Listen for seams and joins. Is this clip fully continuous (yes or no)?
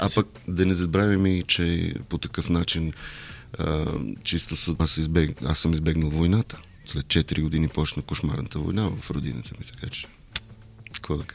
no